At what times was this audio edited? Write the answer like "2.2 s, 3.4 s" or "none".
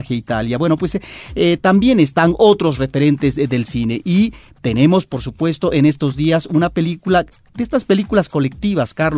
none